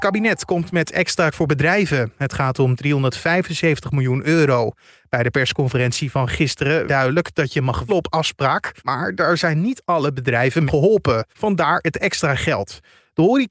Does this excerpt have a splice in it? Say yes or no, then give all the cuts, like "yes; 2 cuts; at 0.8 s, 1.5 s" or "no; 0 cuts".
yes; 6 cuts; at 1.3 s, 6.9 s, 7.9 s, 8.8 s, 10.7 s, 11.3 s